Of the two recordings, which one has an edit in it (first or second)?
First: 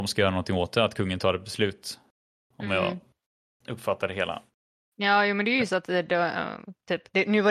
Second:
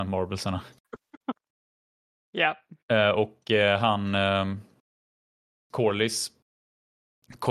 second